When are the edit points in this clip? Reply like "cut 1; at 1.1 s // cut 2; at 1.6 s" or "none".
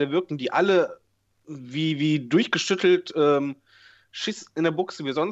none